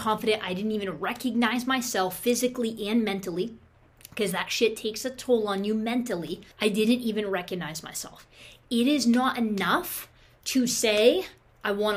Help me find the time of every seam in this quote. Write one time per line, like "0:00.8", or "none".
0:06.5